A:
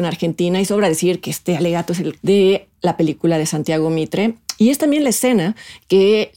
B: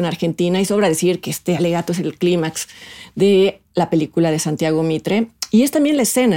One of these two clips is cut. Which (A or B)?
A